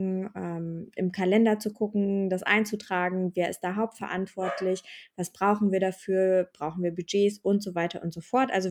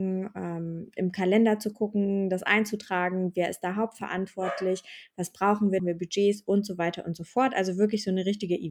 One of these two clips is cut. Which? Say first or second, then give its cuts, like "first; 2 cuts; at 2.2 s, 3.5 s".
second; 1 cut; at 5.8 s